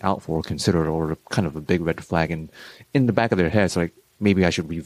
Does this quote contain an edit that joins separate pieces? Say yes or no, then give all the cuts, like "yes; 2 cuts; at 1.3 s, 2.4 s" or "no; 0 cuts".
no; 0 cuts